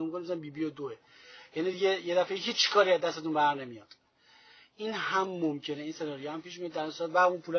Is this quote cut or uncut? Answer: uncut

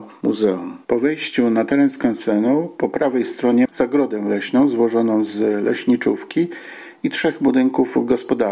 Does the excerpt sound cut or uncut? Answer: cut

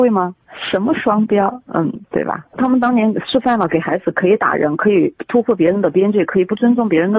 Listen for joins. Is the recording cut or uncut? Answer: cut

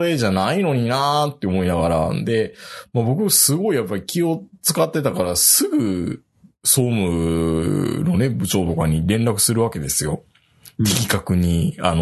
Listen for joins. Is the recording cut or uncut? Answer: uncut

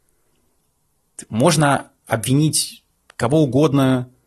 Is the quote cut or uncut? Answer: uncut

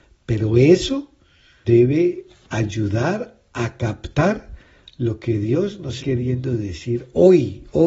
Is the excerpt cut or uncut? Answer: cut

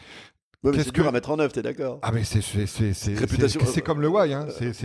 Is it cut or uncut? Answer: uncut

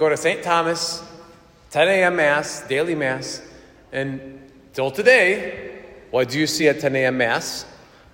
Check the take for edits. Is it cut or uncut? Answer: uncut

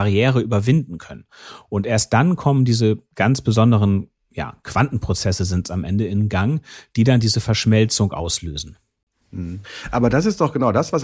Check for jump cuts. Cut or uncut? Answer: uncut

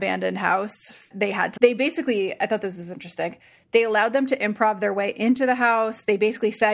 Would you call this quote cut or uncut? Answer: cut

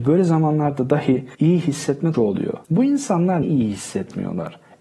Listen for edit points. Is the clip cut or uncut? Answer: cut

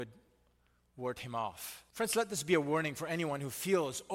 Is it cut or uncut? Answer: cut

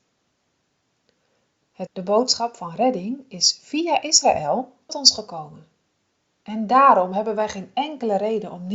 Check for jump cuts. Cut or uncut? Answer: cut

